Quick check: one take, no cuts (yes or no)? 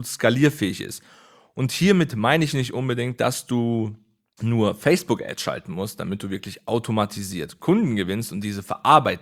yes